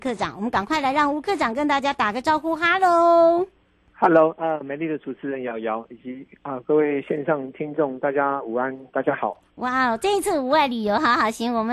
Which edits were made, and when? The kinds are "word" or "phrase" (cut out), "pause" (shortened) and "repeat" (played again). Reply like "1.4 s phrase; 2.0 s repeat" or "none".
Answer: 3.6 s pause